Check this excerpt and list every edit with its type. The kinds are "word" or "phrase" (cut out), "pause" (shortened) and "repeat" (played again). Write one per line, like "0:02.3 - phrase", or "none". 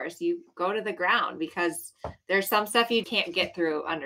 0:03.0 - word

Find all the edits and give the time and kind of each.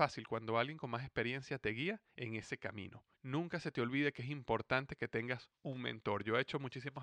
0:02.1 - pause
0:03.1 - pause
0:05.6 - pause

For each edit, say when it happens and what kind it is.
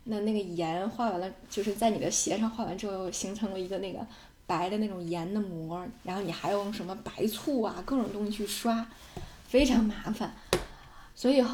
0:06.0 - pause

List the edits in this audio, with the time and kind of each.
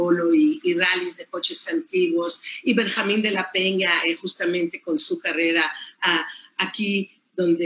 none

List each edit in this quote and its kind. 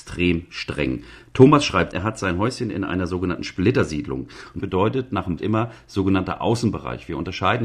0:01.9 - word
0:04.6 - word
0:05.4 - word

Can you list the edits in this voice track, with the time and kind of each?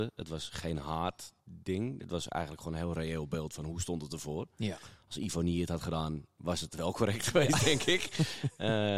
0:01.4 - pause

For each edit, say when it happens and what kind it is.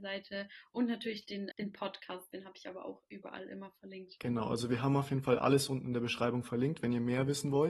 0:01.5 - word

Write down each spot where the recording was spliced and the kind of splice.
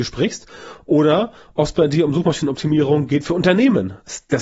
none

